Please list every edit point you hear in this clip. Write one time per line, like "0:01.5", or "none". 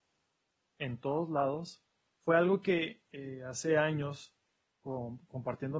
none